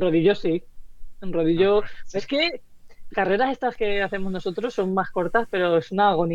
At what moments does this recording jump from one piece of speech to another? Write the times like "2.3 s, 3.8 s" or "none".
2.2 s, 3.1 s